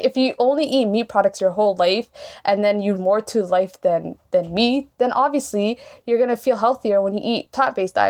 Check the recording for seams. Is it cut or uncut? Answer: cut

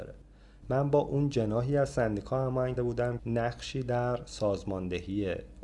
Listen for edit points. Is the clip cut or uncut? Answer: cut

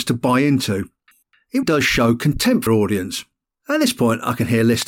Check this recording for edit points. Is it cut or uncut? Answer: cut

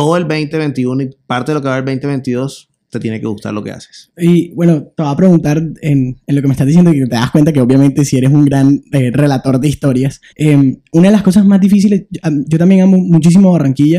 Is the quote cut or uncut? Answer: cut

